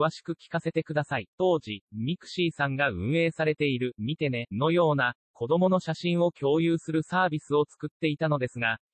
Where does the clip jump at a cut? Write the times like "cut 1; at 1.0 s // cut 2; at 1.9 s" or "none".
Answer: cut 1; at 1.3 s